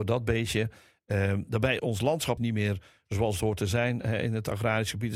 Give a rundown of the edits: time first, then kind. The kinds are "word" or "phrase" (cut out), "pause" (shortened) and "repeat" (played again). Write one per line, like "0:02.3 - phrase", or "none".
0:01.8 - word
0:02.4 - word